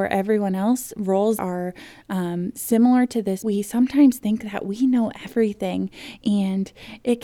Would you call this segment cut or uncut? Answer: cut